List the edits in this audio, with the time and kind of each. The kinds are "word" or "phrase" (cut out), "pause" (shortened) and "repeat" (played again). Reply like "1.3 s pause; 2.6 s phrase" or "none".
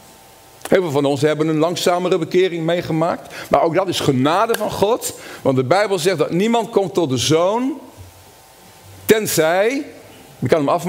none